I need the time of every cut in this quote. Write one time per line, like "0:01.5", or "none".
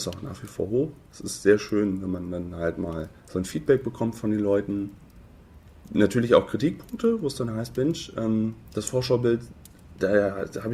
0:03.2

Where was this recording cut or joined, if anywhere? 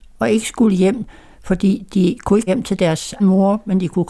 0:02.5
0:03.2

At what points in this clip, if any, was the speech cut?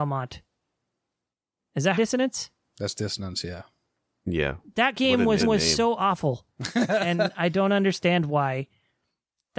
0:02.0
0:05.4

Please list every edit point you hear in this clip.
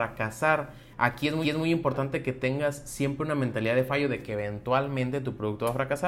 0:01.4

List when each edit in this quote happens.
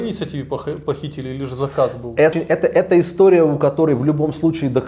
0:02.3

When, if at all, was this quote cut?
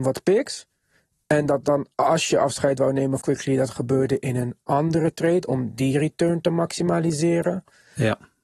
0:03.2

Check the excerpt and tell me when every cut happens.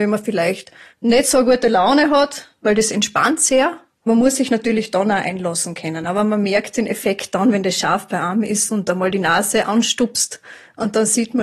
none

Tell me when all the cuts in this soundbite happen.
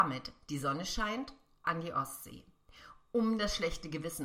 0:01.6

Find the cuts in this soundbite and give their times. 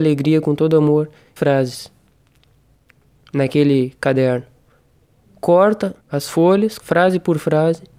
0:01.4
0:06.0
0:06.8

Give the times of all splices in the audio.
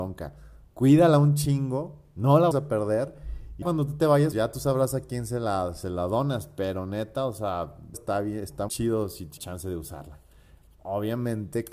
0:02.5
0:03.6
0:04.3
0:07.9
0:08.7
0:09.4

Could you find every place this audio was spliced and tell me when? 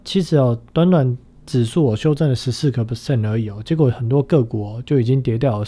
none

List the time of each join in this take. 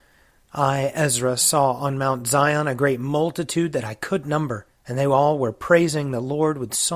0:04.2
0:04.7

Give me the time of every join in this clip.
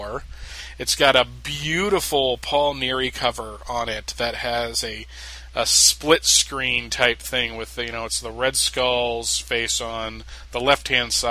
none

